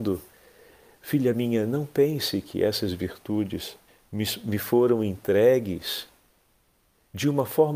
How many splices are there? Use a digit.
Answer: 1